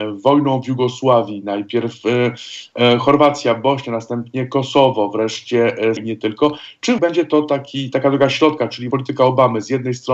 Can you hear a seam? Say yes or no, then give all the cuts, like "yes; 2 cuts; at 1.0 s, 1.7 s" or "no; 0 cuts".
yes; 3 cuts; at 6.0 s, 7.0 s, 8.9 s